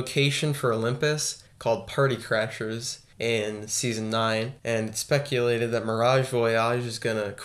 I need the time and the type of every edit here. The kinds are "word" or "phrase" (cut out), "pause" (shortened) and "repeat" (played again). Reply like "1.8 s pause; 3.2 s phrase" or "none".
1.5 s pause; 3.1 s pause; 4.6 s pause